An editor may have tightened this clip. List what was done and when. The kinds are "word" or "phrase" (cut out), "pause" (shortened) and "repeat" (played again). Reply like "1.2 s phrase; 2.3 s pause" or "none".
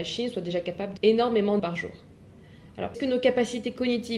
1.0 s word; 1.6 s word; 2.9 s word

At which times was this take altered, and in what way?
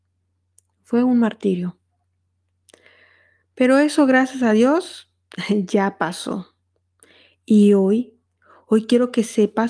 none

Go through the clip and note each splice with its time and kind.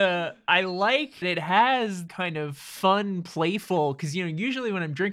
1.2 s word; 2.1 s word

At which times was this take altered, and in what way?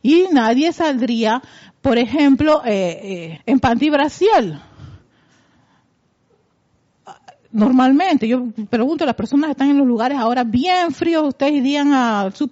3.4 s word

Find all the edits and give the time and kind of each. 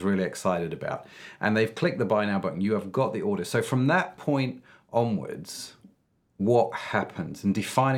none

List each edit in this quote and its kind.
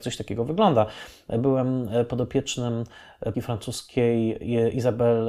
3.3 s word

